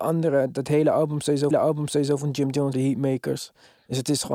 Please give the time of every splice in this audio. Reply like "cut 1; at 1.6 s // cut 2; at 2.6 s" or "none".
cut 1; at 1.5 s // cut 2; at 2.7 s